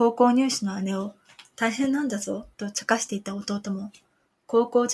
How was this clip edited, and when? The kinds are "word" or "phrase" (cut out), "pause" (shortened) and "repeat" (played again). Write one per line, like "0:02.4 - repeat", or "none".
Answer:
0:02.5 - pause